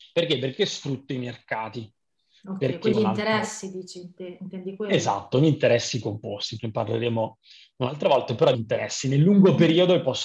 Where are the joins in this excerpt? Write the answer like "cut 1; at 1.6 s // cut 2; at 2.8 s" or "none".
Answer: cut 1; at 2.9 s // cut 2; at 6.6 s // cut 3; at 8.5 s